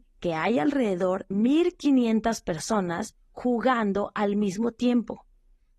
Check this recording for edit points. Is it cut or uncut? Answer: cut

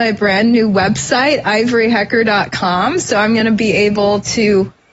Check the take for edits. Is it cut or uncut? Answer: uncut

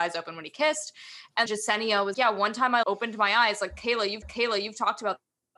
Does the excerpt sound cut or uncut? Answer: cut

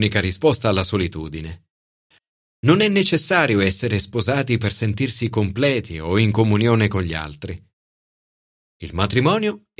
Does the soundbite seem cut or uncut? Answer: uncut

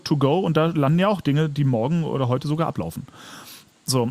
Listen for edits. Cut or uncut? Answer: uncut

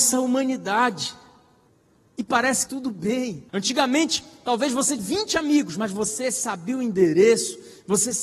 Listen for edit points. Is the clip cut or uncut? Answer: cut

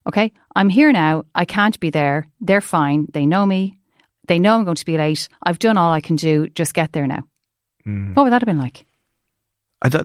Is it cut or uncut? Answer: uncut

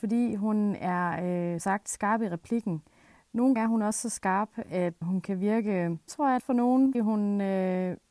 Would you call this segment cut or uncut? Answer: cut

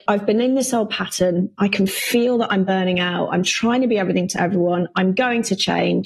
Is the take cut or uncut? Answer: uncut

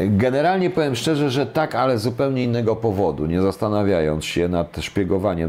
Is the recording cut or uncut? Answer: uncut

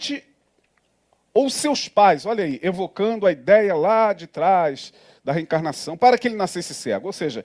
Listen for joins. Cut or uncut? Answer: uncut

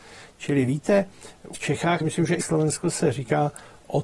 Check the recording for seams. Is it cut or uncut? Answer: cut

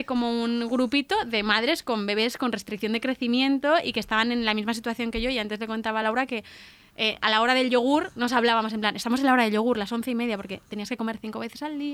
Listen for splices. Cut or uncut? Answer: uncut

